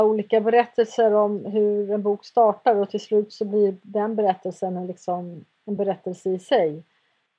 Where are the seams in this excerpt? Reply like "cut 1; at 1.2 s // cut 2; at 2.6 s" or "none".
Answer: none